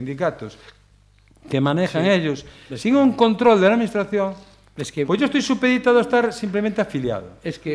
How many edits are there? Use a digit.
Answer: 0